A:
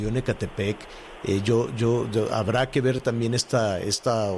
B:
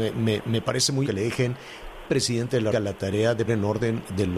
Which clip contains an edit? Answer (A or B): B